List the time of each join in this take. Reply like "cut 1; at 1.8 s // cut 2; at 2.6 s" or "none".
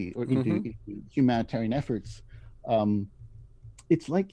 none